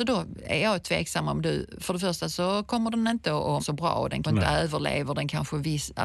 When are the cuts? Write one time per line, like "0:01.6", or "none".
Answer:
0:03.6
0:04.2